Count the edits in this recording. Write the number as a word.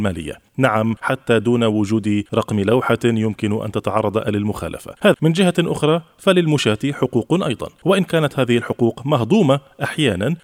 one